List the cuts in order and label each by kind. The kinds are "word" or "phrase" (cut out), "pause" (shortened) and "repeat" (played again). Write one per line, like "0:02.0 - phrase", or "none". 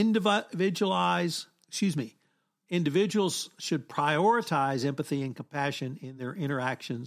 none